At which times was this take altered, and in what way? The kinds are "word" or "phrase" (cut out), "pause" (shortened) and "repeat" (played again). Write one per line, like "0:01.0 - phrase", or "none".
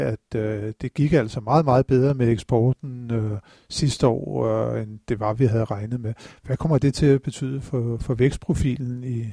none

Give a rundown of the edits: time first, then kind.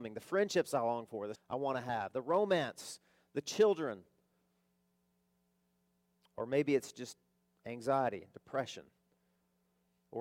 0:01.3 - word

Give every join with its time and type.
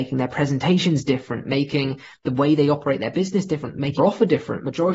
0:04.0 - word

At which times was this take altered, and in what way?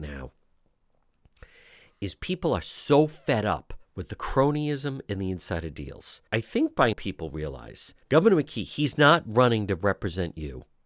0:03.8 - pause
0:06.3 - pause
0:06.9 - word
0:08.0 - pause

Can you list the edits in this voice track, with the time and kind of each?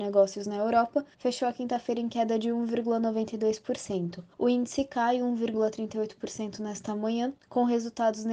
0:01.1 - pause
0:04.3 - pause

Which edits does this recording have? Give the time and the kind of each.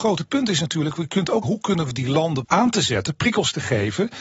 0:01.4 - word
0:02.4 - word

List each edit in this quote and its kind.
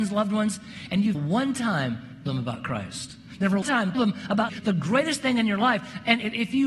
0:01.1 - word
0:02.3 - word
0:03.6 - word
0:03.9 - word
0:04.5 - word

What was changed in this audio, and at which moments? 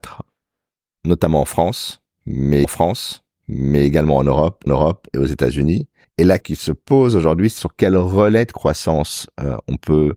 0:02.6 - repeat
0:04.7 - repeat
0:06.0 - pause
0:06.4 - word
0:07.6 - word

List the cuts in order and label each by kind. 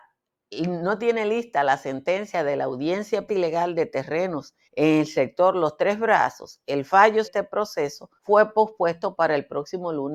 0:03.3 - phrase
0:04.6 - pause
0:07.2 - word
0:08.2 - pause

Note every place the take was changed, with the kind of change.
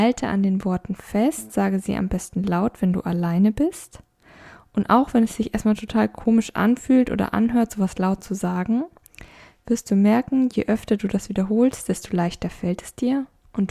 none

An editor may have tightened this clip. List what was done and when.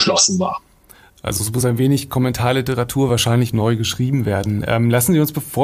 none

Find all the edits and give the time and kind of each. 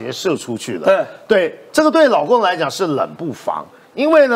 none

